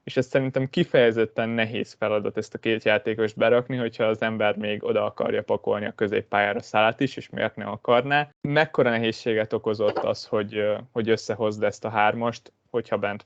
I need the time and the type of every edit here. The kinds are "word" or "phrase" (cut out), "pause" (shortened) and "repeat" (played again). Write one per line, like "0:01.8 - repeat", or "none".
0:08.3 - pause